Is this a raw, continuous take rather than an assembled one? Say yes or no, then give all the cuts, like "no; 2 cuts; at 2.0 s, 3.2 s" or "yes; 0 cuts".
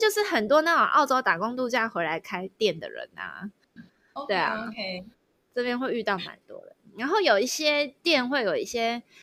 yes; 0 cuts